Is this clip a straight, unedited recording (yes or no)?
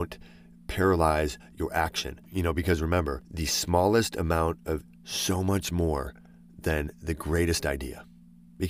no